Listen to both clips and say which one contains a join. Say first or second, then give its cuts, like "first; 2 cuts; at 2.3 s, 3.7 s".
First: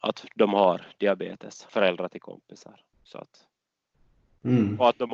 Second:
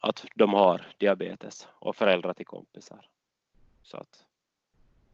first; 2 cuts; at 1.7 s, 2.9 s